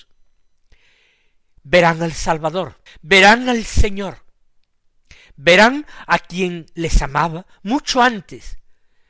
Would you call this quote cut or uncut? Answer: cut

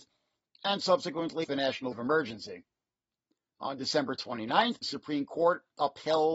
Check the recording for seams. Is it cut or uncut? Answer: cut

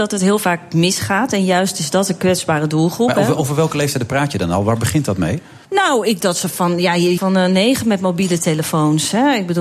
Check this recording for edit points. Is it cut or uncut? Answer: cut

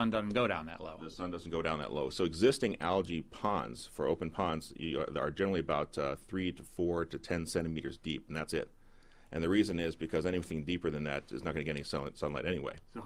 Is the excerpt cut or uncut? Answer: uncut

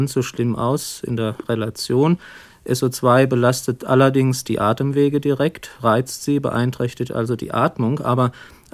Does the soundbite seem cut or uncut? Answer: uncut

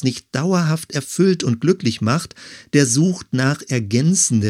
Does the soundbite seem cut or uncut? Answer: uncut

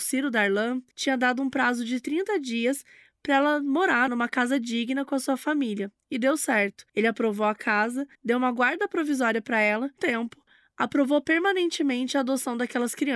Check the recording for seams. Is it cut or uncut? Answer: cut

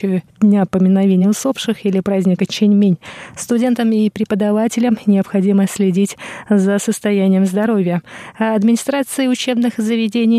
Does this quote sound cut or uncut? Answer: uncut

